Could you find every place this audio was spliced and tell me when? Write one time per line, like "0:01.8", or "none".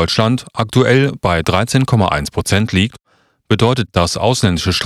0:03.9